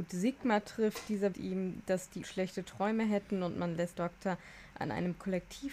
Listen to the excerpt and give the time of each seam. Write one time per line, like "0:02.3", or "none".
0:01.3
0:02.2
0:04.0